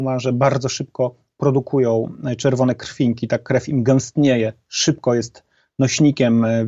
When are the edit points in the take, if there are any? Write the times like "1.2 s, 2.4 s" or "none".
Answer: none